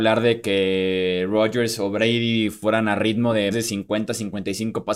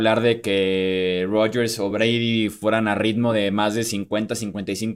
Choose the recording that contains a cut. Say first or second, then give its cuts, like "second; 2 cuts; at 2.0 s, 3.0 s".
first; 1 cut; at 3.5 s